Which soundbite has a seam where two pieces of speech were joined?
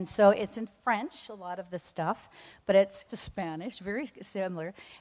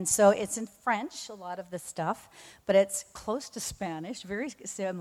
first; 1 cut; at 3.1 s

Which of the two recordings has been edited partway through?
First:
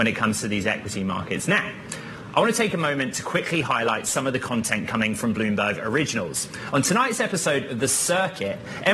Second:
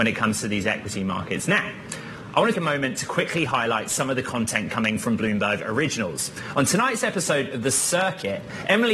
second; 1 cut; at 2.5 s

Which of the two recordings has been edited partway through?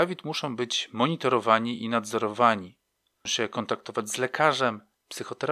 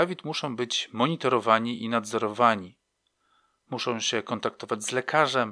first; 1 cut; at 3.3 s

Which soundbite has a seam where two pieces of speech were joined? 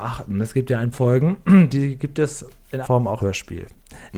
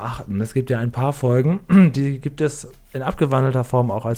first; 3 cuts; at 0.9 s, 2.8 s, 3.2 s

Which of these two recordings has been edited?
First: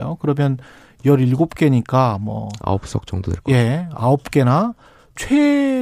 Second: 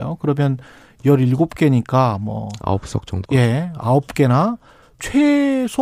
second; 1 cut; at 3.2 s

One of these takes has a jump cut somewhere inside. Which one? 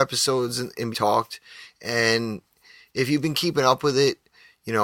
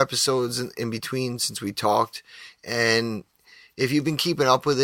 first; 1 cut; at 0.9 s

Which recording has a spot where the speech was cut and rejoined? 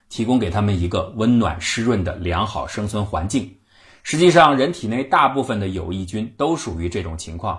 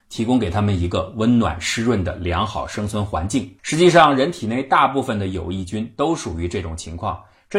second; 1 cut; at 3.6 s

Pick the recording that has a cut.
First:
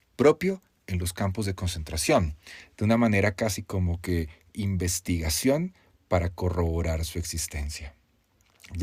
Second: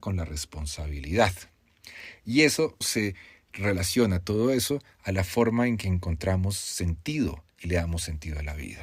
second; 1 cut; at 2.8 s

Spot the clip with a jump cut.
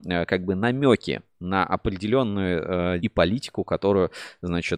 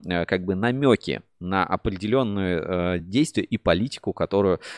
first; 1 cut; at 3.0 s

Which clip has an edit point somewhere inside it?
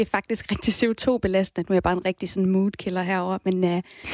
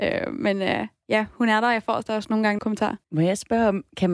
second; 2 cuts; at 2.6 s, 3.0 s

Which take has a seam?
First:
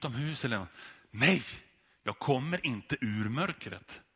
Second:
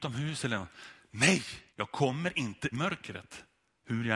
second; 2 cuts; at 1.7 s, 2.7 s

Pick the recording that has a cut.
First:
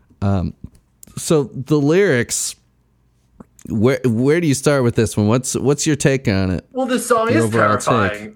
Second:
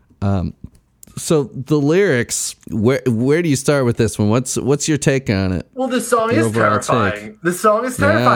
second; 1 cut; at 2.6 s

